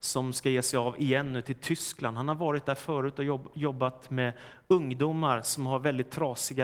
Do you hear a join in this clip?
no; 0 cuts

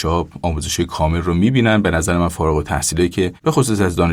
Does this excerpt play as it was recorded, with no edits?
yes; 0 cuts

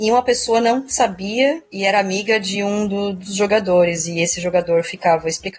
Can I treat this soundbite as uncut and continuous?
yes; 0 cuts

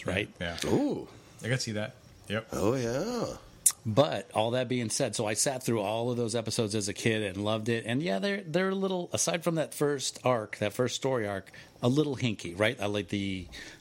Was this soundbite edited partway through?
no; 0 cuts

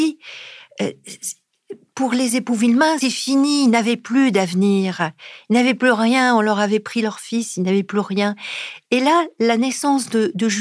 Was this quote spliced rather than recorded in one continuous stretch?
yes; 1 cut; at 3.0 s

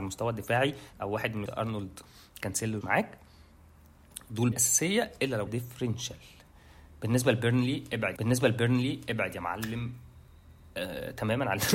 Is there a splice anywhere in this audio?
yes; 6 cuts; at 0.9 s, 1.5 s, 2.8 s, 4.5 s, 5.5 s, 8.2 s

